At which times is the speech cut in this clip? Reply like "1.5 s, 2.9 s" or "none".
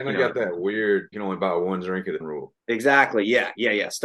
1.1 s, 2.2 s, 2.6 s